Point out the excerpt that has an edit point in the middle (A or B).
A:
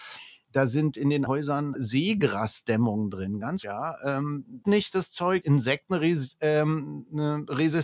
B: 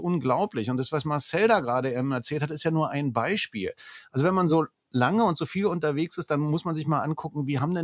A